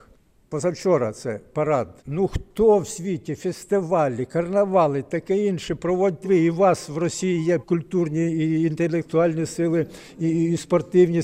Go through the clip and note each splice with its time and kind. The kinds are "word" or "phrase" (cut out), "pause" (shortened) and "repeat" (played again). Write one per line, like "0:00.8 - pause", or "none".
0:02.0 - pause
0:06.2 - word
0:07.6 - word